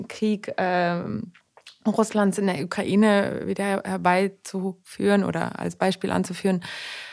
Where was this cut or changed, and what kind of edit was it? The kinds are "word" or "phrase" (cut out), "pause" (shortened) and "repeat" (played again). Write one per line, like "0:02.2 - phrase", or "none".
none